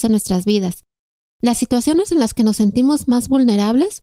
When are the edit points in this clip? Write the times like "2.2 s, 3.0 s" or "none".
none